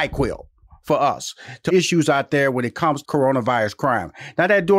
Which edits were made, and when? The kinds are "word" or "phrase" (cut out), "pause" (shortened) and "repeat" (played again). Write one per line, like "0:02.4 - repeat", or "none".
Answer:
0:01.7 - word
0:03.0 - word